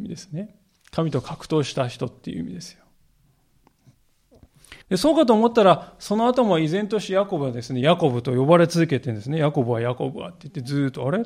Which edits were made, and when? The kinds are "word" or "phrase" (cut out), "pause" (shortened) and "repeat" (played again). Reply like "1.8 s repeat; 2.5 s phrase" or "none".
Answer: 4.8 s pause